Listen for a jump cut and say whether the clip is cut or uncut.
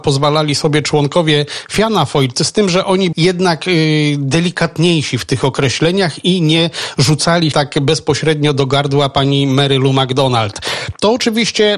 cut